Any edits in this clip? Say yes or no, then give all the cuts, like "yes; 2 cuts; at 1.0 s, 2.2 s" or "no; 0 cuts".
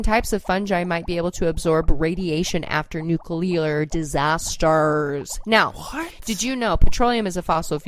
no; 0 cuts